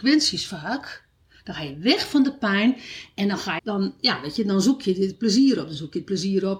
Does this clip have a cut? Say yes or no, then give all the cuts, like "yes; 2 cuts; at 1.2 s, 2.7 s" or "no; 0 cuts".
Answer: yes; 1 cut; at 3.6 s